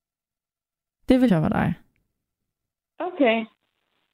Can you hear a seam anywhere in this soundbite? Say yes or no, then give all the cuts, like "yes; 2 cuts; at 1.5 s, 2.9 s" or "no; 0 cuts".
yes; 1 cut; at 1.3 s